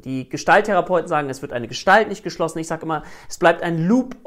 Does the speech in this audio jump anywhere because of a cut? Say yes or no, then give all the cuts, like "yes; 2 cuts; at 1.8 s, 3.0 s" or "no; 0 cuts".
no; 0 cuts